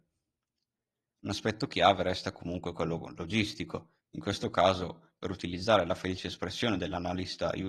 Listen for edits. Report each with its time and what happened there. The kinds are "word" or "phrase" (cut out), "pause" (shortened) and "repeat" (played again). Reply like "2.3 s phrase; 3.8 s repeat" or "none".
4.0 s pause